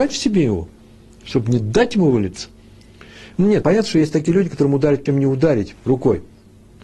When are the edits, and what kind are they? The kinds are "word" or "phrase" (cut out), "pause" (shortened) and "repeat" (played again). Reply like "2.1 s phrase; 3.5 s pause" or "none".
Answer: 3.6 s word; 5.1 s word